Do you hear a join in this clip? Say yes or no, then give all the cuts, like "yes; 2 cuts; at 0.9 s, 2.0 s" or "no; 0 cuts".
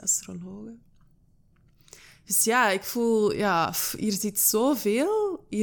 no; 0 cuts